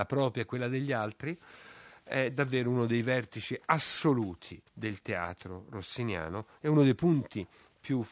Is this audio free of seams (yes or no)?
no